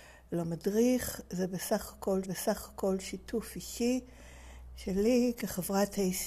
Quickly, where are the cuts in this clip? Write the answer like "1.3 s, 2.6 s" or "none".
2.2 s